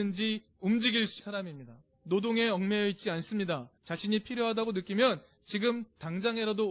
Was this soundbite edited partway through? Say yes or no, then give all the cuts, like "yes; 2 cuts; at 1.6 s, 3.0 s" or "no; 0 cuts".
yes; 3 cuts; at 1.2 s, 1.9 s, 3.8 s